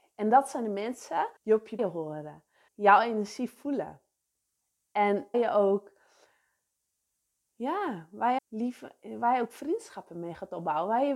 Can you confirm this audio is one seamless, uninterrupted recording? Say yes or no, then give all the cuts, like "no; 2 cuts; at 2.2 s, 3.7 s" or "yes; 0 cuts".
no; 6 cuts; at 1.4 s, 1.8 s, 2.7 s, 5.3 s, 7.5 s, 8.4 s